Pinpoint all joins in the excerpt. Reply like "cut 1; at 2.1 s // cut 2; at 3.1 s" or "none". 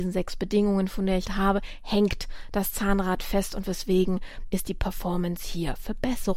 cut 1; at 1.3 s